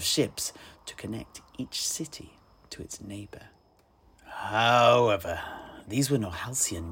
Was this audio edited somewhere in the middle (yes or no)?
no